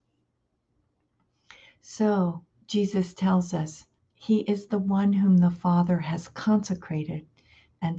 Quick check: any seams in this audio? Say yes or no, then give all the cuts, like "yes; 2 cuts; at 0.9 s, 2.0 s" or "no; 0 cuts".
yes; 2 cuts; at 2.6 s, 4.0 s